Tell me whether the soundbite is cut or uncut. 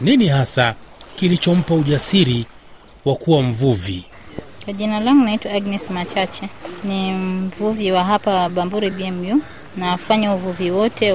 uncut